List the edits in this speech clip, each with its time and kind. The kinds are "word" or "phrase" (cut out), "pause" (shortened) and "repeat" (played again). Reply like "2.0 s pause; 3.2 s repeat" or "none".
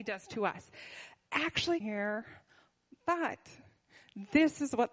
1.8 s phrase